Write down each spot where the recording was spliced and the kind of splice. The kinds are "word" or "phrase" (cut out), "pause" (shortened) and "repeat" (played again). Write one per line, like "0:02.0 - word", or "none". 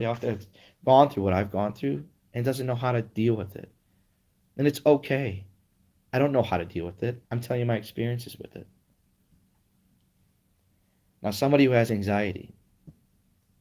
0:07.2 - pause